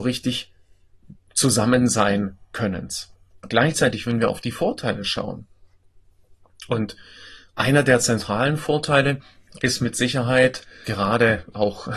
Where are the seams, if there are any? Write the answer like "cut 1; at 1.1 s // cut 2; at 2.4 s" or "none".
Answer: cut 1; at 3.3 s // cut 2; at 9.6 s // cut 3; at 10.8 s